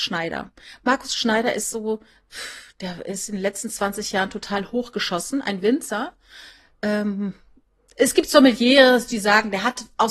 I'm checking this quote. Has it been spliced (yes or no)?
no